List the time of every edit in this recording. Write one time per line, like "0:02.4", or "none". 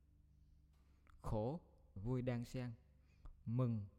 0:02.0